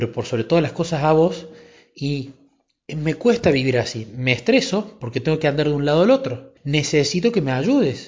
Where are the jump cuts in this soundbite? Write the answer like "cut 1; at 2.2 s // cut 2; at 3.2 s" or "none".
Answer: cut 1; at 6.6 s